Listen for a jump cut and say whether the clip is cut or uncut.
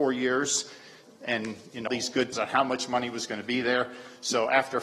cut